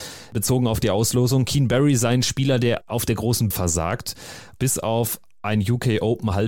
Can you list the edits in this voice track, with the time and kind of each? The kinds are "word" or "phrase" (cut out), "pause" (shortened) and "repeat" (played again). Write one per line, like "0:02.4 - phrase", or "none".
0:02.8 - word
0:03.5 - phrase